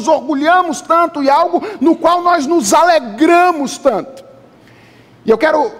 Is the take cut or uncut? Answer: uncut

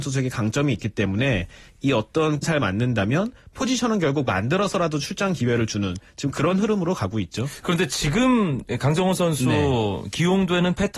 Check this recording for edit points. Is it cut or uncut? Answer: cut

